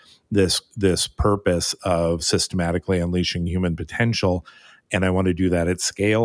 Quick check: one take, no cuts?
yes; 0 cuts

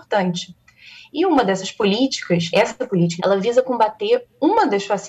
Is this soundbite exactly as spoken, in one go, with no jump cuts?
no; 2 cuts; at 2.5 s, 3.2 s

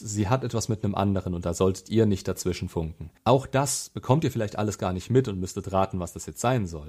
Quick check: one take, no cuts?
no; 1 cut; at 3.2 s

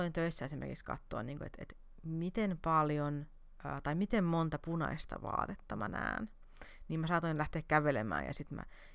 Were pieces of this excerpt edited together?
no; 0 cuts

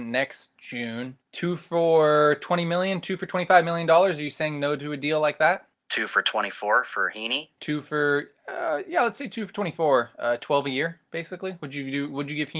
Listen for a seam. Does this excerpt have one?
yes; 2 cuts; at 1.2 s, 5.7 s

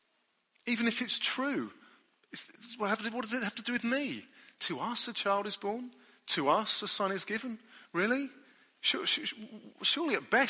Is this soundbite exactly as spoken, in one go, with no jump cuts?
yes; 0 cuts

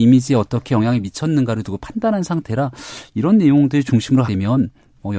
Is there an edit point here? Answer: yes; 1 cut; at 4.3 s

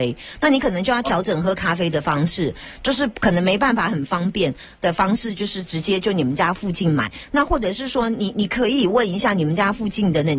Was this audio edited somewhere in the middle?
yes; 1 cut; at 4.7 s

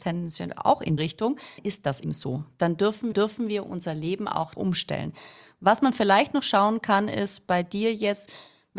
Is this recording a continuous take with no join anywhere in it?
no; 5 cuts; at 1.0 s, 1.6 s, 2.0 s, 3.1 s, 4.5 s

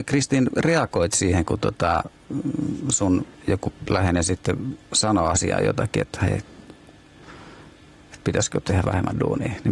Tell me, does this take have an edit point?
yes; 1 cut; at 3.3 s

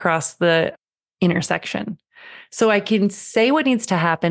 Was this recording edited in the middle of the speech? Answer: no; 0 cuts

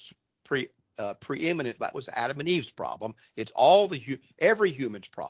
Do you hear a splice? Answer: yes; 1 cut; at 1.8 s

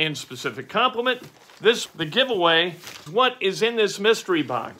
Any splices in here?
yes; 2 cuts; at 1.9 s, 3.1 s

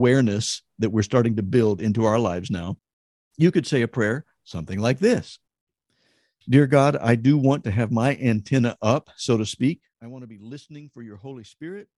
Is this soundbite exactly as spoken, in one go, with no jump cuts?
yes; 0 cuts

